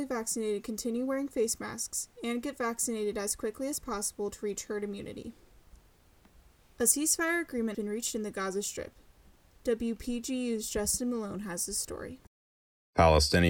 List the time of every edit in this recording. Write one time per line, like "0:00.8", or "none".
0:07.7